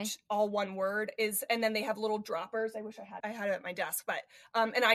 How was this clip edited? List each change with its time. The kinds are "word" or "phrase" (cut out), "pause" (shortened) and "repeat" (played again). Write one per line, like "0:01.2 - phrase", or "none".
0:03.2 - word